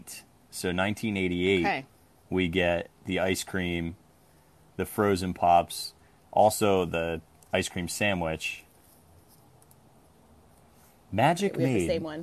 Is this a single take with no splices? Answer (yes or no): yes